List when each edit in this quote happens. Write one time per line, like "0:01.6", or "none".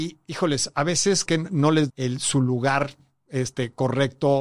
0:01.3
0:01.9